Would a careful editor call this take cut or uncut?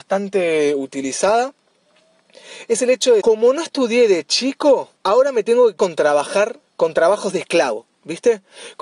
cut